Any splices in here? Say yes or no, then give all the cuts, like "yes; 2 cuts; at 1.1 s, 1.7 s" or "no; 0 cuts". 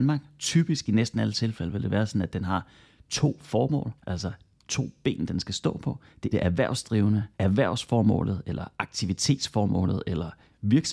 yes; 3 cuts; at 4.0 s, 6.3 s, 7.3 s